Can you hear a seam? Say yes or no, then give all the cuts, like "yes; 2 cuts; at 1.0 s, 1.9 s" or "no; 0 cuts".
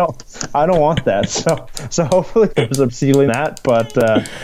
yes; 3 cuts; at 2.5 s, 2.9 s, 3.3 s